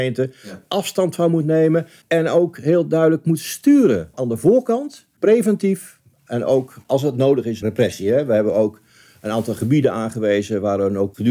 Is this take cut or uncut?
cut